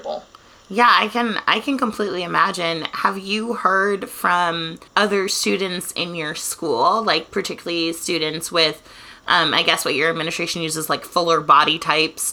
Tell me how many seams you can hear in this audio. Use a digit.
1